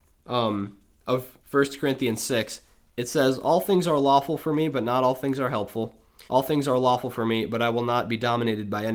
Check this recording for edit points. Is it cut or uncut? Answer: cut